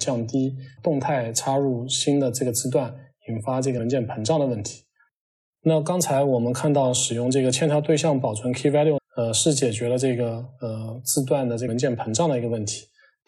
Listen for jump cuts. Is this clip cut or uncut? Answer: cut